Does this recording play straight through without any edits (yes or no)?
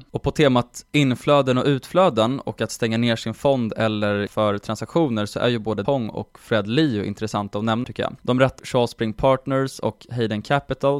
no